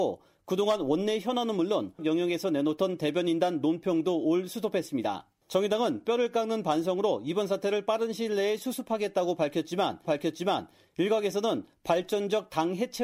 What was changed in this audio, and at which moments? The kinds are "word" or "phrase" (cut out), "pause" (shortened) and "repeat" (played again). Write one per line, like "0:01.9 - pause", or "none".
0:02.0 - word
0:05.4 - pause
0:10.0 - repeat